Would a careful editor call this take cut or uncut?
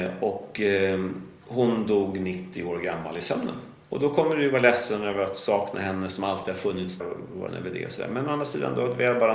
cut